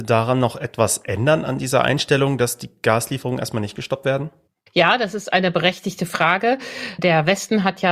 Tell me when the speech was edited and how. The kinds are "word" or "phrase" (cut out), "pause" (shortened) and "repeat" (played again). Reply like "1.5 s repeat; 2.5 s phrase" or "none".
none

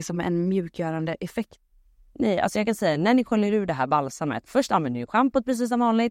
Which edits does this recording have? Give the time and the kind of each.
none

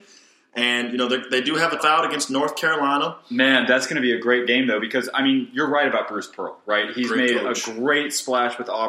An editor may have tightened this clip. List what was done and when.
1.8 s word

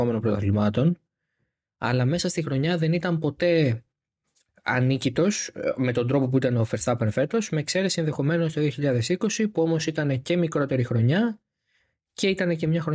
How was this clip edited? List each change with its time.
none

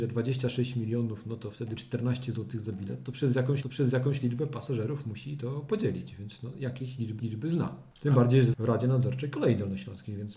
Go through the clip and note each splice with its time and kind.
1.8 s word; 3.6 s repeat; 7.2 s repeat; 8.5 s word

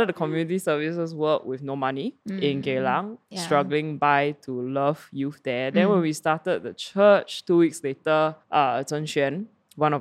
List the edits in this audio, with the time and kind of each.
2.2 s pause; 8.4 s pause

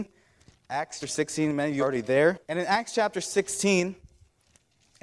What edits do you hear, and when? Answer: 1.0 s word; 1.8 s word; 2.4 s pause

